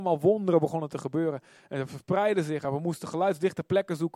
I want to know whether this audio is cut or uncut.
uncut